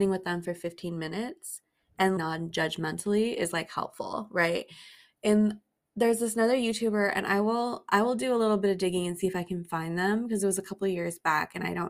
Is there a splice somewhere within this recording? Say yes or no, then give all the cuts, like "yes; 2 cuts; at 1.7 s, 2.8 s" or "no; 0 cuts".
yes; 1 cut; at 2.2 s